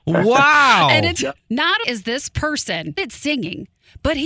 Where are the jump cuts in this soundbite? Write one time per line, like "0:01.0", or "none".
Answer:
0:01.2
0:01.8
0:03.0